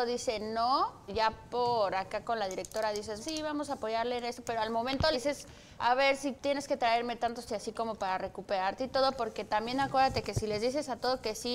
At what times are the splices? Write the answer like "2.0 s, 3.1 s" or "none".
1.1 s, 3.2 s, 5.1 s, 5.8 s, 6.4 s, 7.5 s